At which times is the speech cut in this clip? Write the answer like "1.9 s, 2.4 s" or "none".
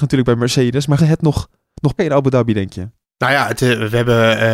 1.0 s, 2.0 s, 3.0 s